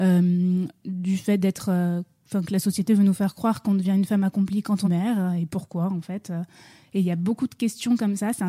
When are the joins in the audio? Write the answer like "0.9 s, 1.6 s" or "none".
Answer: 4.8 s